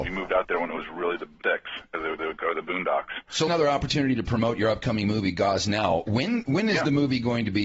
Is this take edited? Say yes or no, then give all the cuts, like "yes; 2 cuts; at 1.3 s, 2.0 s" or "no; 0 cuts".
yes; 3 cuts; at 1.4 s, 2.2 s, 3.5 s